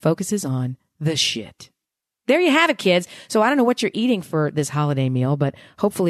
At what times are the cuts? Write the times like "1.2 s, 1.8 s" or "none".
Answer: 1.8 s